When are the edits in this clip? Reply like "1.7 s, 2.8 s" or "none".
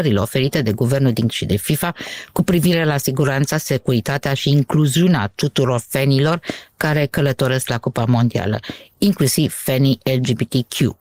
1.3 s